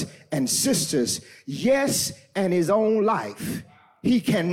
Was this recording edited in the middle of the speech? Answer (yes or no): no